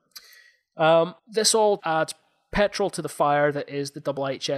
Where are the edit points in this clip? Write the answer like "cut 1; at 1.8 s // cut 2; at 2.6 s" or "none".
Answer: cut 1; at 1.2 s // cut 2; at 1.8 s